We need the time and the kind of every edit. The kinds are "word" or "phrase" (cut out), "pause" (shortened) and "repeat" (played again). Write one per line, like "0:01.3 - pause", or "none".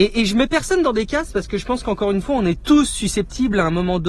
none